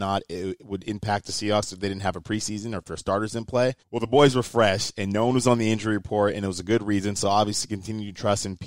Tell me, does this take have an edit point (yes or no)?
yes